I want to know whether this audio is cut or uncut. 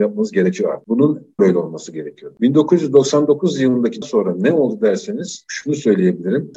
cut